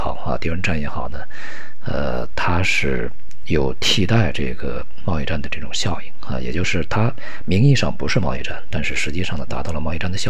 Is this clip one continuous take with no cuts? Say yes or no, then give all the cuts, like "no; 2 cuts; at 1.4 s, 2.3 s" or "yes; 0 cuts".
yes; 0 cuts